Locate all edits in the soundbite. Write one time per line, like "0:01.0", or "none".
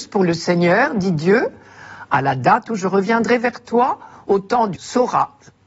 0:04.8